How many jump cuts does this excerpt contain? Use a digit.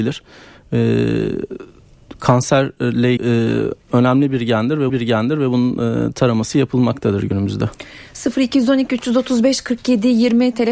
2